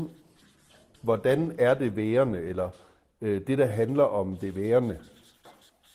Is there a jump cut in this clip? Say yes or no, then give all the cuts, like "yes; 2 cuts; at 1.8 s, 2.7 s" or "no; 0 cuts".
no; 0 cuts